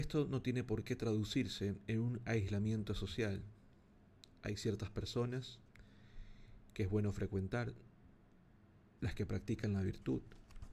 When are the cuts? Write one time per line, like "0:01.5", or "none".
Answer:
none